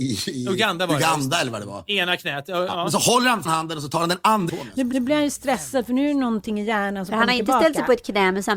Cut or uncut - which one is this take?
cut